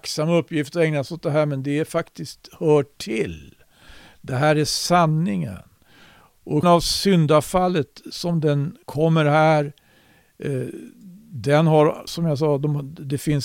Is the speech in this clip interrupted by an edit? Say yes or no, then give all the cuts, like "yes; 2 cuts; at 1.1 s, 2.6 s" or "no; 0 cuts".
yes; 3 cuts; at 6.6 s, 8.8 s, 12.1 s